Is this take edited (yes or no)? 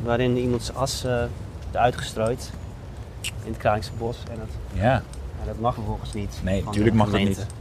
yes